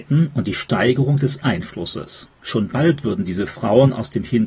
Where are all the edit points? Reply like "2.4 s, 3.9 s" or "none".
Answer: 1.4 s, 2.3 s